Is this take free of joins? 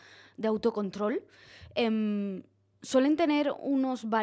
yes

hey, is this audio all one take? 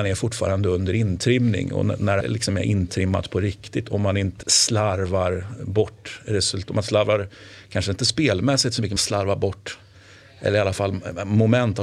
no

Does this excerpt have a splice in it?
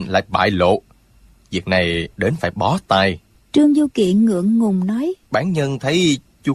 yes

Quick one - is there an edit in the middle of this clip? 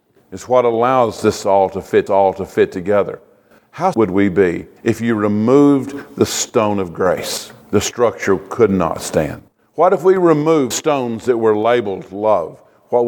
yes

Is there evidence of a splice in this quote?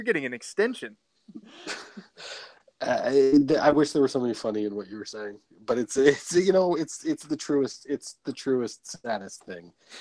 no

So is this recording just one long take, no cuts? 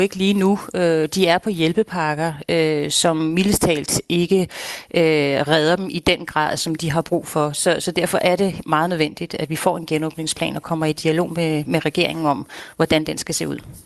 yes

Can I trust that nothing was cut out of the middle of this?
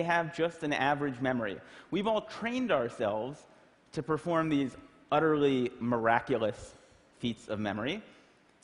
yes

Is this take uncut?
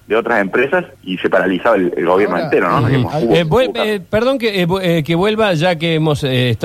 no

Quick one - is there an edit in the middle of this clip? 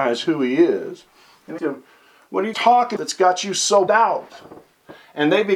yes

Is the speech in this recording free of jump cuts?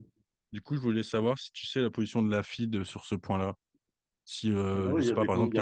yes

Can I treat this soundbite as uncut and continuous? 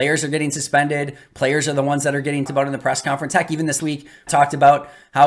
no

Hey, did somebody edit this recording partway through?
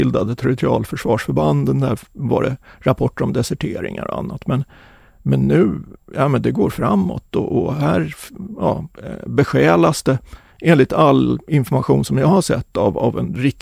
no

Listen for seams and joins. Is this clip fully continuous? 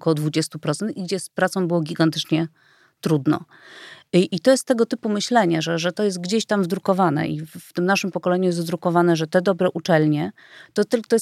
yes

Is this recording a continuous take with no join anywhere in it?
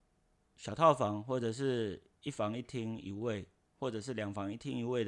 yes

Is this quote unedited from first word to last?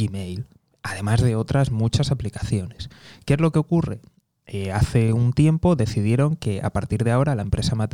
yes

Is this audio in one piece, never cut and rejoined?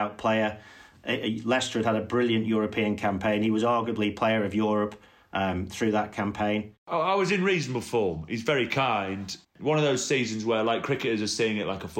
yes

